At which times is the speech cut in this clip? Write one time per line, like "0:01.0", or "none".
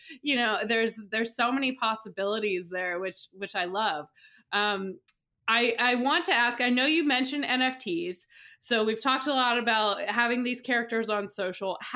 none